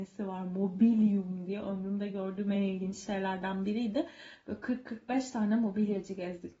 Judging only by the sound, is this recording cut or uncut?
uncut